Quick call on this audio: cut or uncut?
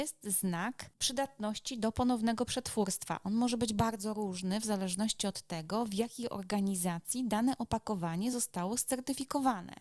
uncut